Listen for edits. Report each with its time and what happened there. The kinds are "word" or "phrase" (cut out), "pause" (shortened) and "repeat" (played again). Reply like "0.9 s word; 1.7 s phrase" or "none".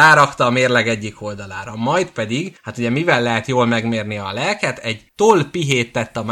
2.6 s pause; 5.1 s pause